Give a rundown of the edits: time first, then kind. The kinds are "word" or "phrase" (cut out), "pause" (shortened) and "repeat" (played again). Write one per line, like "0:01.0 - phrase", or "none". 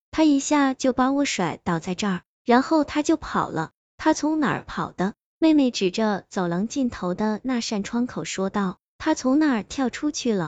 none